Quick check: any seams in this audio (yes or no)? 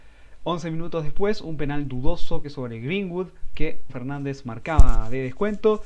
yes